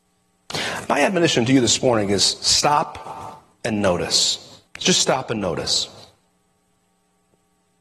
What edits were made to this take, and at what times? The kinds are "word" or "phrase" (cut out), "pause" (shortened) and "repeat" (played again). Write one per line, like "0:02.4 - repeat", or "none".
0:03.5 - pause
0:04.7 - pause

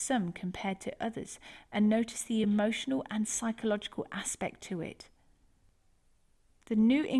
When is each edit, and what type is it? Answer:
none

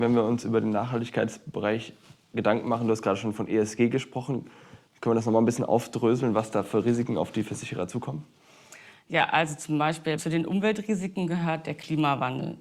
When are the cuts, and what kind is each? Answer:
none

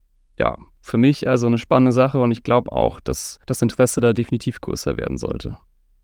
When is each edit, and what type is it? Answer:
0:03.4 - pause

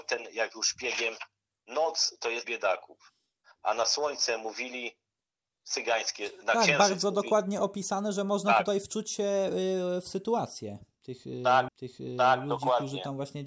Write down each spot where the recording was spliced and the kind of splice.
0:02.4 - phrase
0:11.7 - repeat

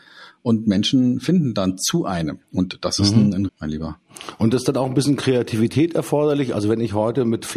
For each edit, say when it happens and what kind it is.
0:02.4 - pause
0:03.5 - word

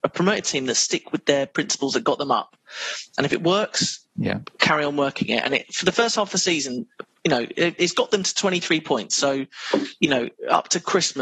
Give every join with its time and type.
none

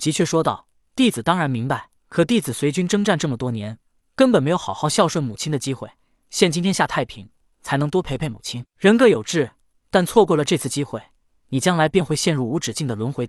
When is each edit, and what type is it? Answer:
0:02.0 - pause

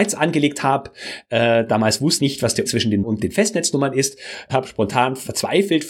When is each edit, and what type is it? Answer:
0:02.2 - word
0:02.6 - word
0:03.0 - word
0:04.5 - word

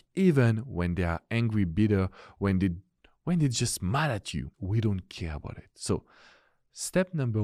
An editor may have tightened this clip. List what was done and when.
0:04.5 - pause

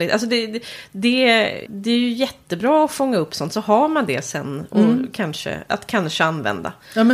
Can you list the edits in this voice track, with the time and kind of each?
0:01.7 - word

